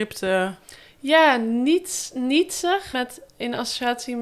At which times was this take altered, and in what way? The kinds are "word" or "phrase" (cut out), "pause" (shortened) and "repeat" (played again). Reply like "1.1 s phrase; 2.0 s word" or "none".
2.9 s phrase